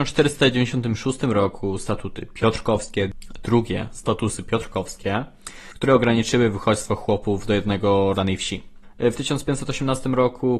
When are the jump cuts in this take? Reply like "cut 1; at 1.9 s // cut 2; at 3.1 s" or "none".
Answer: cut 1; at 8.1 s